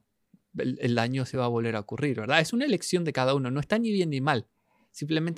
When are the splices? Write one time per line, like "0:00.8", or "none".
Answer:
none